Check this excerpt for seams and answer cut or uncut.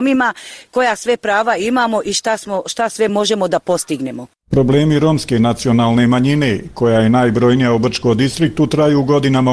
uncut